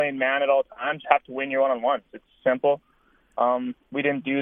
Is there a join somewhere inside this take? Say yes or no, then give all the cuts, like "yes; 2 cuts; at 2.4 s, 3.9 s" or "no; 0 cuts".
yes; 2 cuts; at 1.0 s, 2.4 s